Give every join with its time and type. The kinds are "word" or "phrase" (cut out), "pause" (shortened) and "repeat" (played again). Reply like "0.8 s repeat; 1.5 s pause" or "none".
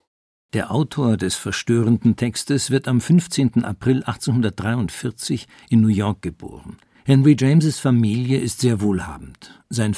6.9 s pause